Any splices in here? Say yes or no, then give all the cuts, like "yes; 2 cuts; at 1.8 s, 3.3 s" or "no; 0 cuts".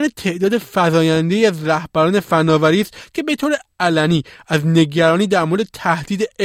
no; 0 cuts